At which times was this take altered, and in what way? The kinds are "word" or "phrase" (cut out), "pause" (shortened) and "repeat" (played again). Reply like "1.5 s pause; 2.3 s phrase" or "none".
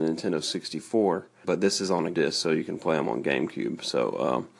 1.4 s word; 2.1 s word